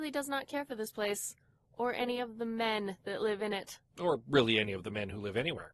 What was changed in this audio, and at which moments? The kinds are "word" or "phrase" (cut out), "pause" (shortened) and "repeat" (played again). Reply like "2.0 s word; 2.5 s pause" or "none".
none